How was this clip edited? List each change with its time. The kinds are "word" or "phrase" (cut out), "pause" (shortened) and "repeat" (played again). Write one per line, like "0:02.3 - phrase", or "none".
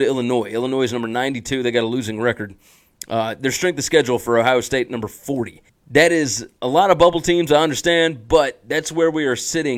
0:05.7 - pause